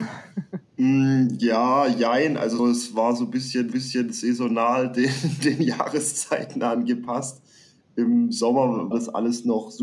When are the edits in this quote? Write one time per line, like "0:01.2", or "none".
0:02.6
0:03.7
0:08.9